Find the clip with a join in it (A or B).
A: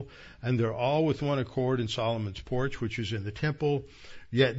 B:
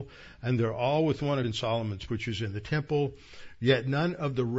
B